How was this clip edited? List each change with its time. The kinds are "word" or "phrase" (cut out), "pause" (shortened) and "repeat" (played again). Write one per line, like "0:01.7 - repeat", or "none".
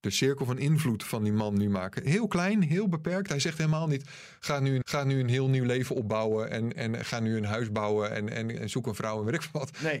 0:04.8 - repeat
0:08.6 - word

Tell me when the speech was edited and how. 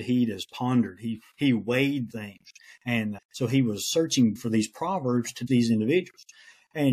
0:02.1 - word
0:03.2 - word
0:04.4 - word
0:05.5 - word

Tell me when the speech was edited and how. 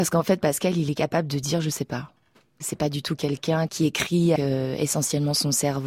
0:04.4 - word

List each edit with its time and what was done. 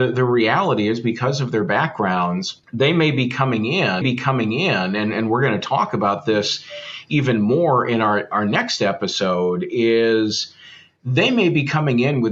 0:02.6 - pause
0:04.0 - repeat

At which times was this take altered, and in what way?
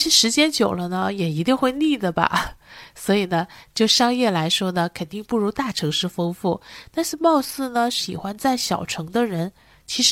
none

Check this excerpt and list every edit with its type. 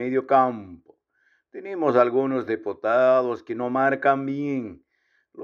none

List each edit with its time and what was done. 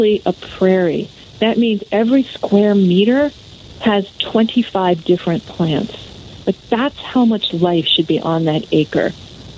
none

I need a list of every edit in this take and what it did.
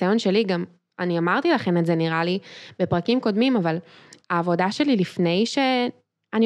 none

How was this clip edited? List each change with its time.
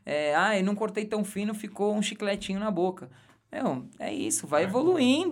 none

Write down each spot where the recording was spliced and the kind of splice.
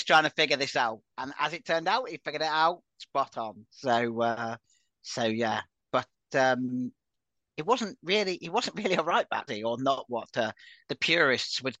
0:09.5 - word

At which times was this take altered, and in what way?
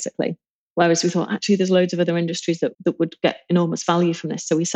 0:02.7 - pause

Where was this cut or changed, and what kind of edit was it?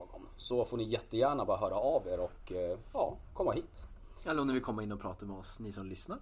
none

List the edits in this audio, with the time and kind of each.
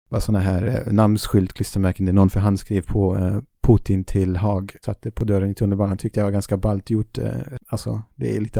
0:04.8 - word

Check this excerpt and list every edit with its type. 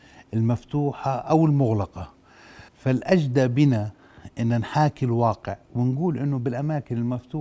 0:02.7 - pause

